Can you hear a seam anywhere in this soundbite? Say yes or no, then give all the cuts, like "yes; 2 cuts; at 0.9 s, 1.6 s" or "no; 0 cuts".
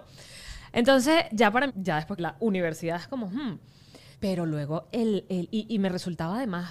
yes; 4 cuts; at 1.3 s, 1.7 s, 2.2 s, 4.1 s